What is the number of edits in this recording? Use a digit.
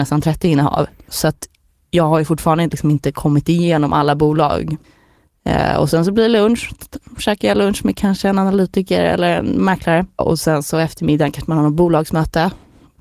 0